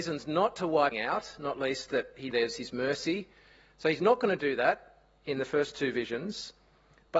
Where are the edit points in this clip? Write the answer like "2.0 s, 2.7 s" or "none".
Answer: 0.9 s, 2.3 s